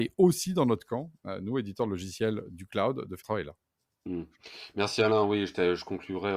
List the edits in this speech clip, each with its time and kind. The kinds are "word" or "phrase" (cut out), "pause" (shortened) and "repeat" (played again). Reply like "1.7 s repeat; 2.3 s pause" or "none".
3.2 s word